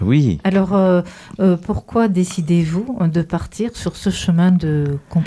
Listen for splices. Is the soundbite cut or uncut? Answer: uncut